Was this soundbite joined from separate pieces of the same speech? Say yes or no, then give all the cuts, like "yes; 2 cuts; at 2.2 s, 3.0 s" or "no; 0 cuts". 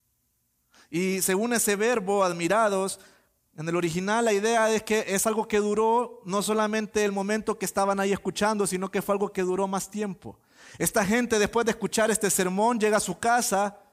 no; 0 cuts